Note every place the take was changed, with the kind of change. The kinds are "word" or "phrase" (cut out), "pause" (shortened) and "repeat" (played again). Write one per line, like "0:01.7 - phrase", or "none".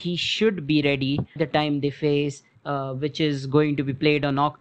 0:01.4 - word
0:02.6 - word

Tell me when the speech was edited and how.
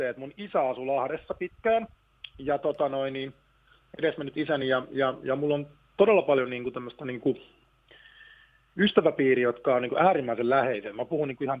none

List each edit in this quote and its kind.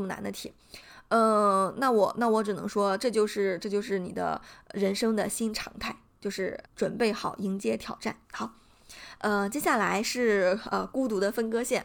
0:06.7 - pause
0:08.2 - pause

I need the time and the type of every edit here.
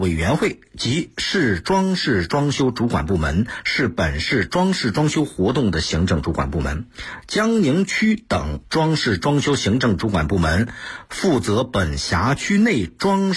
0:08.6 - pause

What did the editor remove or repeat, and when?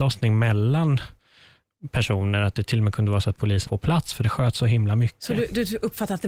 0:03.7 - word

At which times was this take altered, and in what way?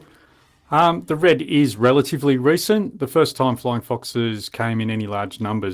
none

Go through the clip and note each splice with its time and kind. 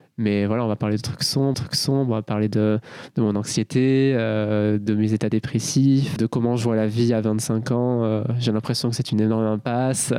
0:01.5 - repeat
0:06.2 - word

